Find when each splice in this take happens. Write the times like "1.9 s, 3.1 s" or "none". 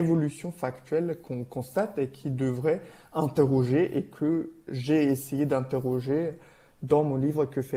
none

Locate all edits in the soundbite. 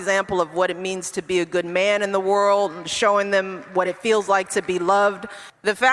none

